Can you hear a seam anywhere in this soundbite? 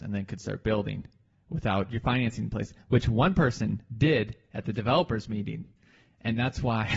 no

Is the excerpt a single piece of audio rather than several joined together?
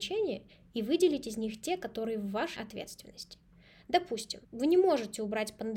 no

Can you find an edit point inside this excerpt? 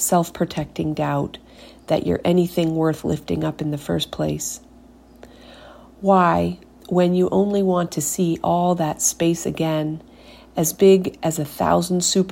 no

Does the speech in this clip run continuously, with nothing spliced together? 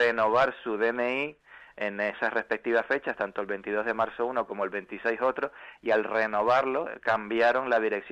yes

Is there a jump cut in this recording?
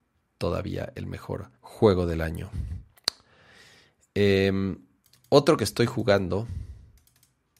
yes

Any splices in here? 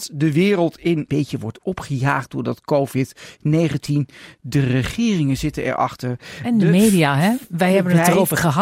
yes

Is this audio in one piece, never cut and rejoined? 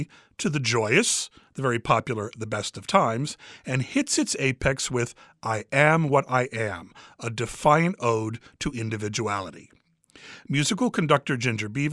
yes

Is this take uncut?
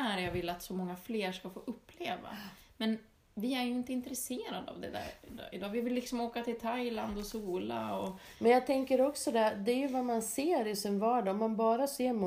yes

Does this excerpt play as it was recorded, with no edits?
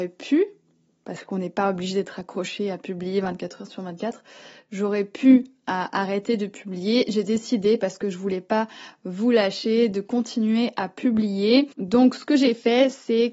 no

